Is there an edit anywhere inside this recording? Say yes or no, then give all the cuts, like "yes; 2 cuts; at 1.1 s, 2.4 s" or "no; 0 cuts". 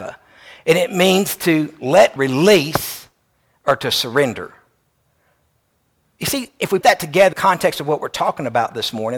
yes; 3 cuts; at 2.2 s, 6.8 s, 7.3 s